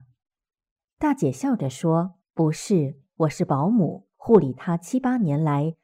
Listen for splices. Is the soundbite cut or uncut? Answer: cut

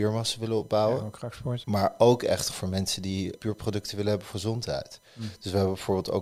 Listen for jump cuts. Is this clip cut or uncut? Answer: cut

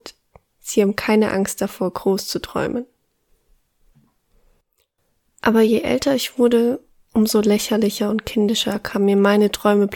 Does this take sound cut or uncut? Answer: uncut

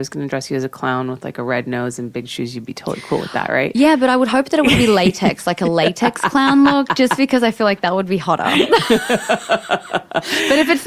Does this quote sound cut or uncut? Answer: uncut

